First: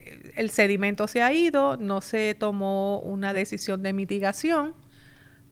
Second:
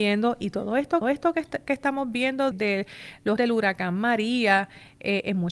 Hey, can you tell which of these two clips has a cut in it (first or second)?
second